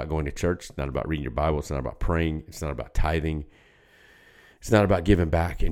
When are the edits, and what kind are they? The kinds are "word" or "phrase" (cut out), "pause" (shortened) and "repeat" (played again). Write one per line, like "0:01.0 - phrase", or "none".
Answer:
none

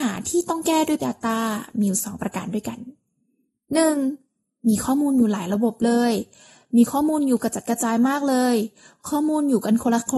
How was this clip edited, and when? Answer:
0:01.0 - word

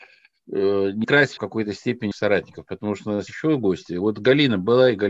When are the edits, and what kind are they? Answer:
0:01.0 - word
0:01.4 - phrase
0:02.1 - phrase
0:03.3 - word

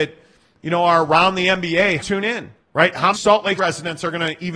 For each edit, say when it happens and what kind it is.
0:02.0 - phrase
0:02.6 - pause
0:03.1 - word
0:03.6 - word

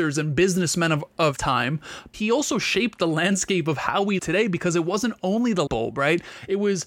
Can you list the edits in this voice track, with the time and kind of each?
0:01.4 - word
0:02.1 - word
0:04.2 - word
0:05.7 - word

